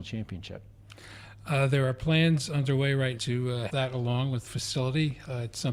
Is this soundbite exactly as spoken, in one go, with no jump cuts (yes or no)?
no